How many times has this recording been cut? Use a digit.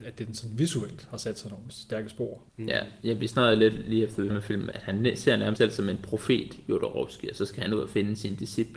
5